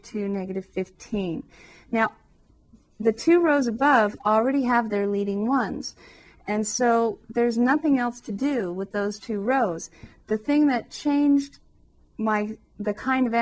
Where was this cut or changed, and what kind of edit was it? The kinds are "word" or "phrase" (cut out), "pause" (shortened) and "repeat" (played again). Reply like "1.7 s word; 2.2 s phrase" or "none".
none